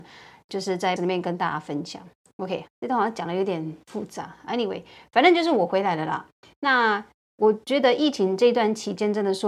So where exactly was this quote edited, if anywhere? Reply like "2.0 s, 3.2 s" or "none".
1.0 s, 2.7 s

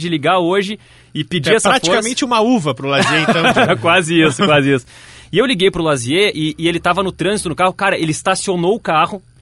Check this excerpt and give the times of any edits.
none

